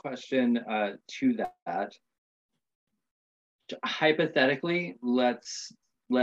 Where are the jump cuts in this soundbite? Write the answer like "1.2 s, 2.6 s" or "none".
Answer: 4.9 s